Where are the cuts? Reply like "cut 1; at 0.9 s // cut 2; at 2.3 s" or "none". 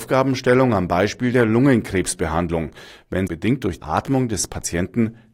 cut 1; at 3.3 s // cut 2; at 3.8 s